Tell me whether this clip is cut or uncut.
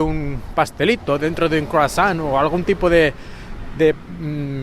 uncut